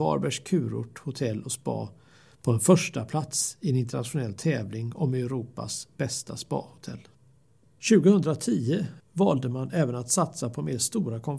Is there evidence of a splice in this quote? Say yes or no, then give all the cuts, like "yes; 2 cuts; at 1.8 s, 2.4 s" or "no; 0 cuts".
no; 0 cuts